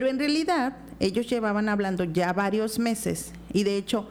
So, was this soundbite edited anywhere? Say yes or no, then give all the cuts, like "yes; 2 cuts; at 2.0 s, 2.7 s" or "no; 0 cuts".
no; 0 cuts